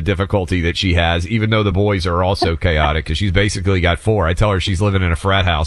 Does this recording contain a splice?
no; 0 cuts

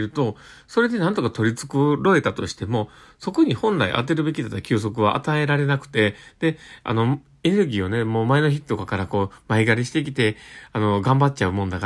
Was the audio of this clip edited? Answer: no; 0 cuts

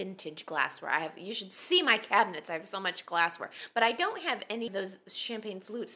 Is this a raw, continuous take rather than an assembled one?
no; 1 cut; at 4.7 s

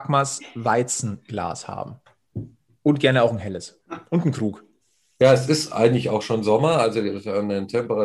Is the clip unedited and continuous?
yes; 0 cuts

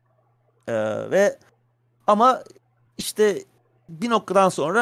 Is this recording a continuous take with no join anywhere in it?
yes; 0 cuts

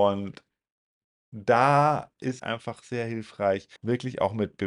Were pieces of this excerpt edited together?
yes; 2 cuts; at 2.4 s, 3.8 s

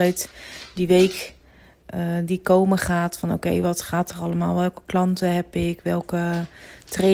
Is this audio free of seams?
yes; 0 cuts

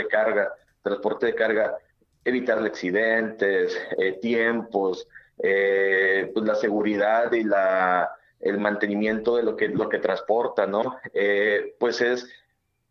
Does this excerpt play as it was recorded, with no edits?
yes; 0 cuts

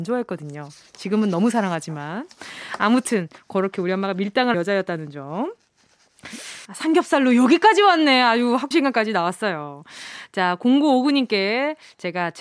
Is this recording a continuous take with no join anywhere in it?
no; 3 cuts; at 4.5 s, 6.6 s, 8.7 s

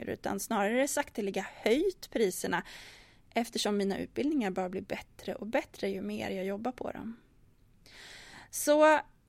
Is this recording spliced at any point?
no; 0 cuts

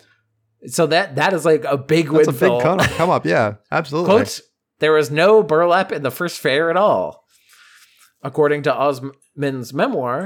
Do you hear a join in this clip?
no; 0 cuts

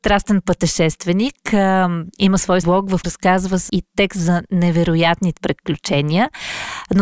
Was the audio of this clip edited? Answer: yes; 5 cuts; at 2.1 s, 2.6 s, 3.0 s, 3.7 s, 5.4 s

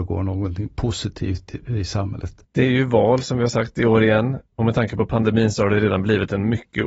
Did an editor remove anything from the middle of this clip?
yes; 2 cuts; at 2.4 s, 4.5 s

